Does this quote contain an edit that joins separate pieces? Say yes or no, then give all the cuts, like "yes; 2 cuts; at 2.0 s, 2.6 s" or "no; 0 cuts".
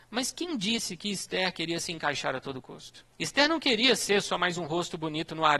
yes; 1 cut; at 3.1 s